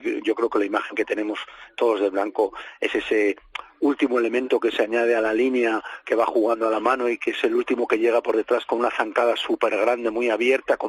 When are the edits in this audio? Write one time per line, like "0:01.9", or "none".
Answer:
none